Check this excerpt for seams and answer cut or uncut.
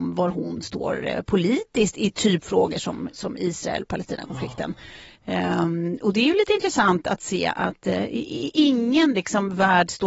uncut